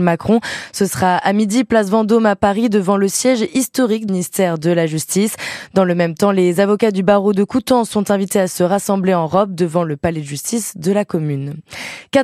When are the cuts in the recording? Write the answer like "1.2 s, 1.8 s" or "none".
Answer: 4.1 s